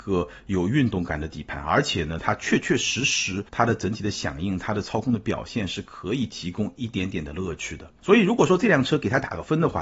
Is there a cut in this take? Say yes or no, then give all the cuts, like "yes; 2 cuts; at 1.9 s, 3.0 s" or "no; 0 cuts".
yes; 2 cuts; at 3.5 s, 8.0 s